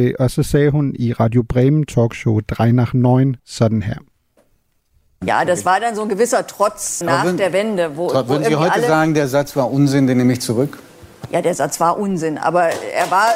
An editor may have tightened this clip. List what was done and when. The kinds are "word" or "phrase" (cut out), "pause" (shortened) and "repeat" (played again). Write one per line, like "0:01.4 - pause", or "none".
0:03.4 - pause
0:07.0 - word